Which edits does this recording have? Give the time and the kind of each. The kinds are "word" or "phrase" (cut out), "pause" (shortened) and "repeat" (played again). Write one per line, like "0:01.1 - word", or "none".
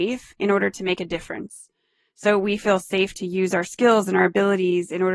none